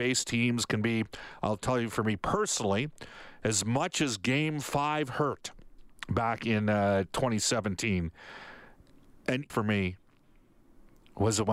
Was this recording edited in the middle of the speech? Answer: yes; 2 cuts; at 6.0 s, 9.5 s

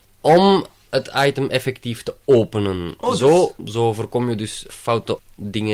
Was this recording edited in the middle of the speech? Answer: no; 0 cuts

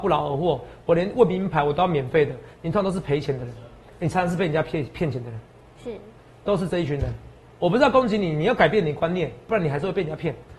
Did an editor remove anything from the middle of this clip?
no; 0 cuts

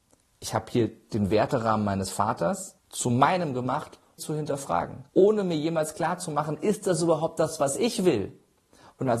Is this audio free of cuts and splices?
no; 3 cuts; at 2.8 s, 4.2 s, 5.1 s

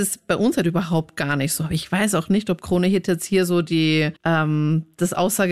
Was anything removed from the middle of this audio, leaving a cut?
yes; 1 cut; at 4.2 s

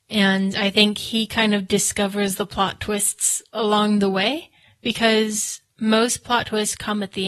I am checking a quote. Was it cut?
no; 0 cuts

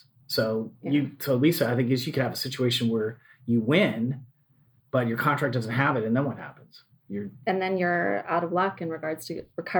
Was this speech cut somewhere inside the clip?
no; 0 cuts

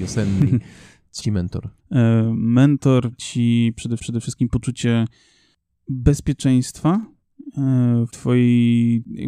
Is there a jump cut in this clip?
yes; 5 cuts; at 1.2 s, 1.8 s, 3.1 s, 4.0 s, 8.1 s

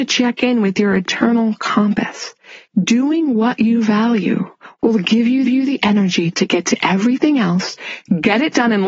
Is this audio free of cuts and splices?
no; 1 cut; at 5.4 s

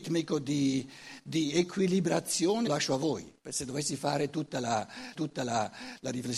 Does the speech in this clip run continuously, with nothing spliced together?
no; 3 cuts; at 2.7 s, 3.4 s, 5.1 s

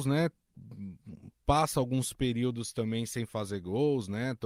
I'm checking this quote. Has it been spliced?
no; 0 cuts

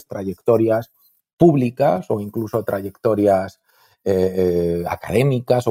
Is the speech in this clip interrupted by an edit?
no; 0 cuts

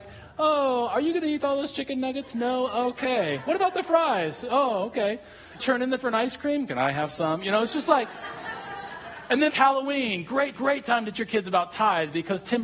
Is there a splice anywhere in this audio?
yes; 5 cuts; at 5.6 s, 6.0 s, 9.5 s, 10.5 s, 11.1 s

